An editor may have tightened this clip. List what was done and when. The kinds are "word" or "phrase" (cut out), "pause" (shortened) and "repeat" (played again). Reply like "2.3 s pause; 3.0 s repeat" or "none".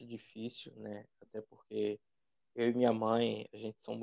none